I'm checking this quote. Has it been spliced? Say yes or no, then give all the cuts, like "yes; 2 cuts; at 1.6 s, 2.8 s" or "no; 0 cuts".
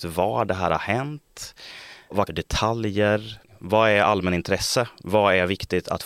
yes; 1 cut; at 2.3 s